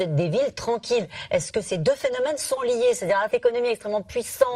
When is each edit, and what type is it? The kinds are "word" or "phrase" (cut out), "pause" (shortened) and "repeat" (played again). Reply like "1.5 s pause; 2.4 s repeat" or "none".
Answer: 2.6 s word; 3.3 s word